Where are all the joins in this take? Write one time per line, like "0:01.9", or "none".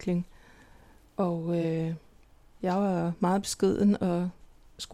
none